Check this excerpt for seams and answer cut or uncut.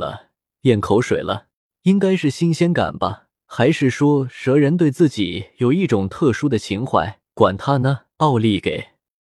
cut